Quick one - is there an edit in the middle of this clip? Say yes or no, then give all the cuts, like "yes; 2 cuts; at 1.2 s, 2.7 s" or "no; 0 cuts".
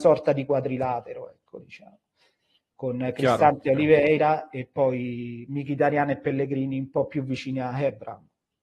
no; 0 cuts